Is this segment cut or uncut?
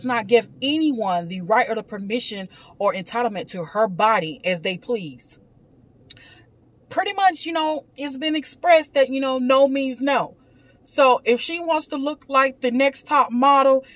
cut